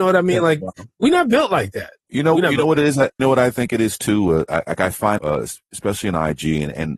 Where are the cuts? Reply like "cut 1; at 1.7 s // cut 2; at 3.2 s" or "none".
cut 1; at 2.0 s // cut 2; at 3.2 s // cut 3; at 5.2 s